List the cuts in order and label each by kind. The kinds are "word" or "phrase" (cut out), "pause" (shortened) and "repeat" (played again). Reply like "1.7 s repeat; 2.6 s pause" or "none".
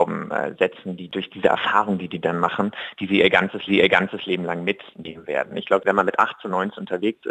3.7 s repeat